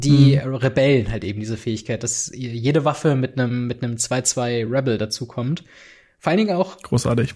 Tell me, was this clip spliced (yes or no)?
no